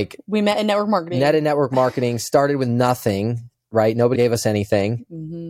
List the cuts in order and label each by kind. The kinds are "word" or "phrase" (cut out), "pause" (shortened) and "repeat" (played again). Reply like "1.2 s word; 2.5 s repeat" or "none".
4.1 s word